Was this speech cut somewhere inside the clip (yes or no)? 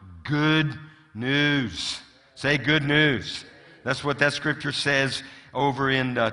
no